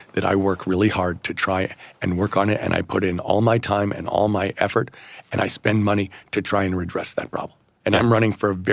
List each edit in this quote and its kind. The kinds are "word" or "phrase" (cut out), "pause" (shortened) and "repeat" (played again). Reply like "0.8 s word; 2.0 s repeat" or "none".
none